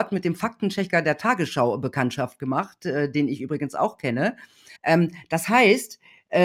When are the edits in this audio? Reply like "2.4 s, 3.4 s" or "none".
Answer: 4.8 s